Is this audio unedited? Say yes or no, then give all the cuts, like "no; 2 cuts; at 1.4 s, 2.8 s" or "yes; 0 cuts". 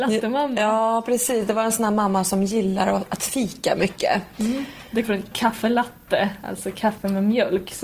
no; 1 cut; at 5.0 s